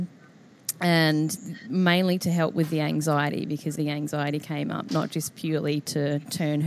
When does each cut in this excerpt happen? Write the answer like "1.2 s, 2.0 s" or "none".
3.8 s